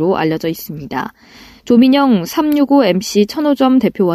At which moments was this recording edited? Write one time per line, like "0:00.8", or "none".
none